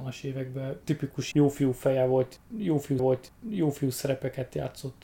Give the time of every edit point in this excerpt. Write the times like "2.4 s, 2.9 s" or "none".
1.3 s, 3.0 s